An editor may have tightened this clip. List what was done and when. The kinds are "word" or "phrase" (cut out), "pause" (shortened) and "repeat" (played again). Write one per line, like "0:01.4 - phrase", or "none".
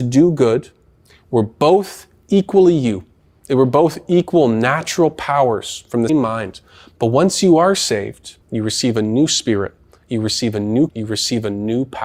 0:06.1 - word
0:08.4 - pause
0:10.9 - word